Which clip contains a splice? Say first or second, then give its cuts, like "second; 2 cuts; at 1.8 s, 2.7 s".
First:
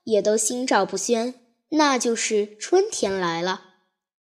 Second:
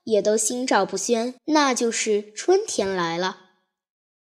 second; 1 cut; at 1.4 s